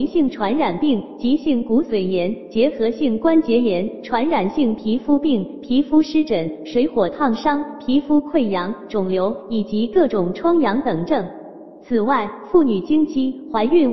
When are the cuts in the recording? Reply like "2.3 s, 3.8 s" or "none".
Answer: none